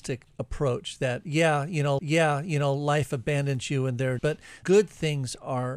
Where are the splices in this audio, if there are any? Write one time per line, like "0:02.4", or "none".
0:02.0
0:04.2
0:04.6